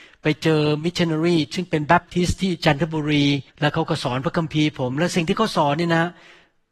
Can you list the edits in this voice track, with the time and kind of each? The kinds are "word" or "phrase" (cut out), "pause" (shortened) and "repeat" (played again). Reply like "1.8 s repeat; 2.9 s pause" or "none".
3.5 s pause